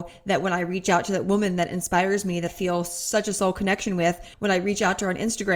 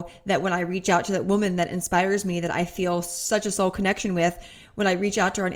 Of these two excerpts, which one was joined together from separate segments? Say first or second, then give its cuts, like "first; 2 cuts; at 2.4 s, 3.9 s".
first; 2 cuts; at 2.5 s, 4.3 s